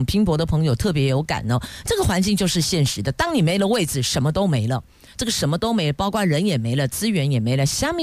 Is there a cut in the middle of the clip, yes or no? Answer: no